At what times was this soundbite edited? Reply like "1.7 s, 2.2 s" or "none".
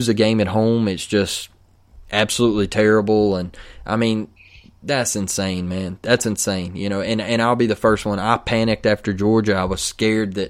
none